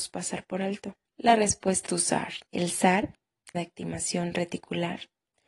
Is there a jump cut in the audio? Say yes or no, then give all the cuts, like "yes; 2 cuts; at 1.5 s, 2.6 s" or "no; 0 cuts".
yes; 4 cuts; at 1.1 s, 1.9 s, 2.4 s, 3.5 s